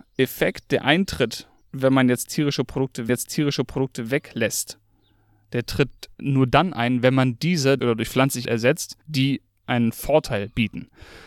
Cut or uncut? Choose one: cut